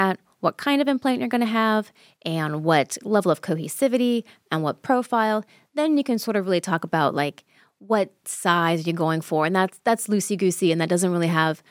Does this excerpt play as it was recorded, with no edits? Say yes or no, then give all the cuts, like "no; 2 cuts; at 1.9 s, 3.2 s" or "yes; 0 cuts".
yes; 0 cuts